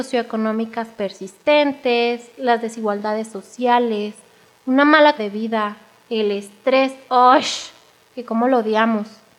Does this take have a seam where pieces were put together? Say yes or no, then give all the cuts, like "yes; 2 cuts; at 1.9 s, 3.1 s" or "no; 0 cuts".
yes; 1 cut; at 5.2 s